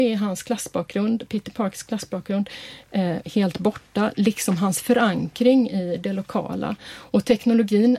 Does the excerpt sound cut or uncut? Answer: uncut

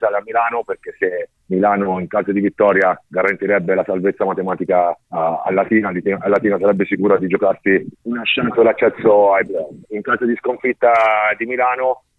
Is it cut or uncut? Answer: cut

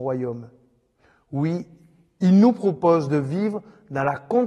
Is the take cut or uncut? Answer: uncut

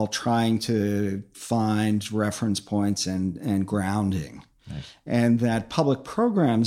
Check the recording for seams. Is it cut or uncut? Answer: uncut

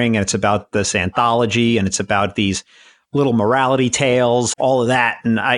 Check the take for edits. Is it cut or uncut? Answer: cut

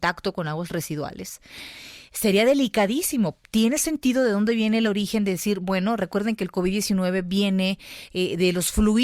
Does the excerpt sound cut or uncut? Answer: uncut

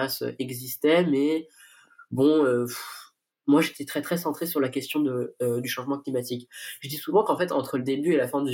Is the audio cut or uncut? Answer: uncut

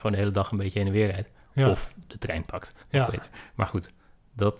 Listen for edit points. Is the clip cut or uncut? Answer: cut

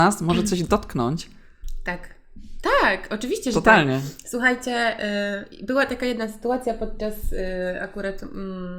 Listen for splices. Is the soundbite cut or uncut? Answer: uncut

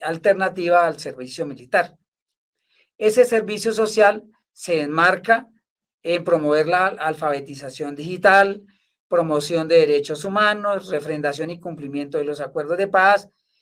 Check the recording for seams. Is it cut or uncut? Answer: uncut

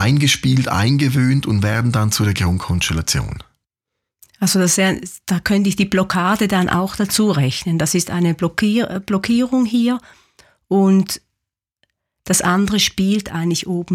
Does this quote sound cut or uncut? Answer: uncut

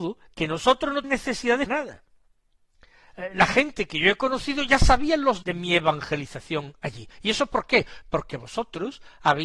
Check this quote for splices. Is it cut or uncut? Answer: cut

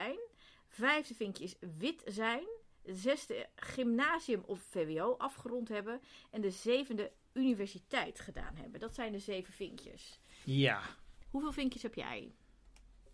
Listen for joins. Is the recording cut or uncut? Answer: uncut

